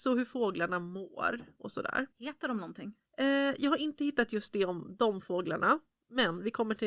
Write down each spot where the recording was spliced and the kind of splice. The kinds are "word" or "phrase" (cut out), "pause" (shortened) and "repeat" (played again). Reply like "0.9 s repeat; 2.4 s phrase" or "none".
2.1 s pause